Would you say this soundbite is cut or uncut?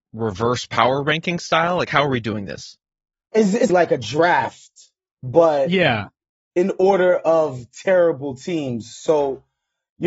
cut